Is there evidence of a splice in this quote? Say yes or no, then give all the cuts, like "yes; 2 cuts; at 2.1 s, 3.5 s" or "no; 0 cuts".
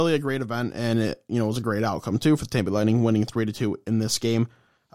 no; 0 cuts